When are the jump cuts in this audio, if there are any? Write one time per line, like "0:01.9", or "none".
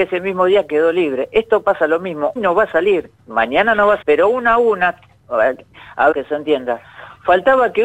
0:02.4
0:03.2
0:04.0
0:06.1